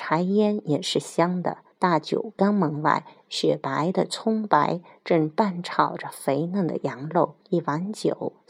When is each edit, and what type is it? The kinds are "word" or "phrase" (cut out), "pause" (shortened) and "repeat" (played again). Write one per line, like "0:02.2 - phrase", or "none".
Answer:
0:01.7 - pause
0:07.4 - pause